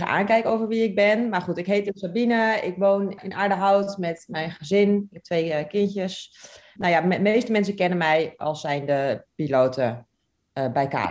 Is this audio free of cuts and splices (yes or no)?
yes